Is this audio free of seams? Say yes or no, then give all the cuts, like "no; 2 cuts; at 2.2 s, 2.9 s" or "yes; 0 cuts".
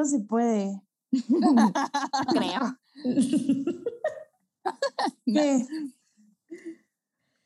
no; 1 cut; at 2.3 s